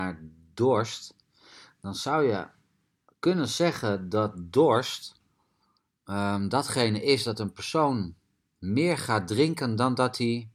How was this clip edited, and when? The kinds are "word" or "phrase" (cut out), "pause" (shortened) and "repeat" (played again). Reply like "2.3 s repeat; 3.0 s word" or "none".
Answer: none